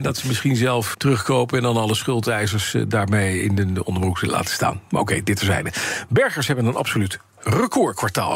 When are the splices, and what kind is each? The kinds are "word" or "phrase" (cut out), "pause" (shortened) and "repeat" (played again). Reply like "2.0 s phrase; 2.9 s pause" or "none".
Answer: 0.9 s word